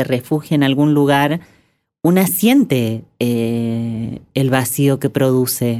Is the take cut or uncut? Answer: uncut